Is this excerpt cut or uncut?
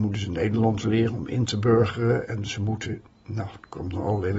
uncut